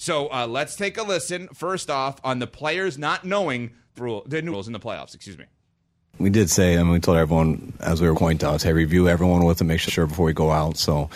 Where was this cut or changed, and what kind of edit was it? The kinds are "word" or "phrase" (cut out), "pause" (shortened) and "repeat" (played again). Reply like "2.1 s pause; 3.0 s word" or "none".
4.0 s phrase; 4.5 s word; 8.1 s phrase; 9.9 s word